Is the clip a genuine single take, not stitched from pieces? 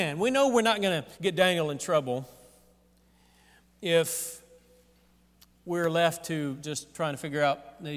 no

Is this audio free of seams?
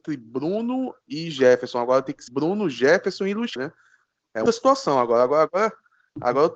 no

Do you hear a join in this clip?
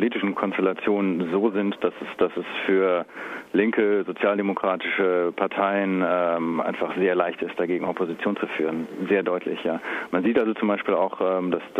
no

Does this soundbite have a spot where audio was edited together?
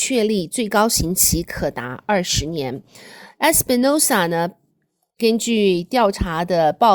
no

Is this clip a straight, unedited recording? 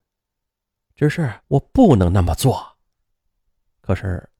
no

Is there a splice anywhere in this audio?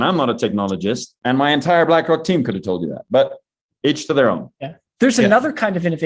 yes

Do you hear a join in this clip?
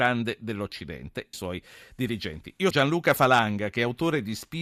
yes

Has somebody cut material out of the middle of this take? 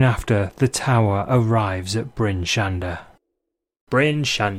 no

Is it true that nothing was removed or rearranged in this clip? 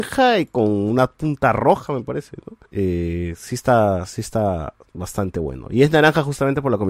no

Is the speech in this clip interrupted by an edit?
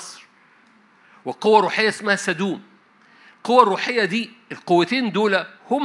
no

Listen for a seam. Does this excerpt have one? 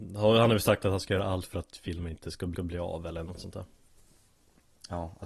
yes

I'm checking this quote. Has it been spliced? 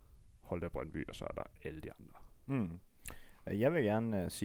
no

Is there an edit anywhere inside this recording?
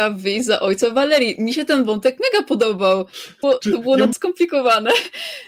yes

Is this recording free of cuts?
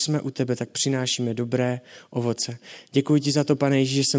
yes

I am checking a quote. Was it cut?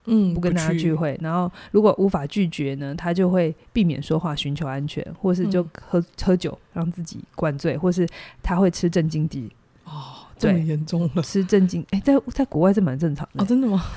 yes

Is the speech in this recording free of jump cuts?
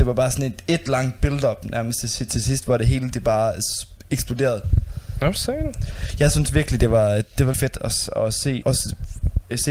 no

